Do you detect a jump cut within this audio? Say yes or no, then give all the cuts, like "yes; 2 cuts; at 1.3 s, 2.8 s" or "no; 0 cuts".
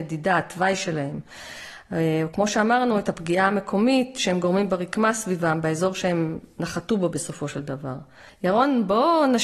yes; 1 cut; at 8.3 s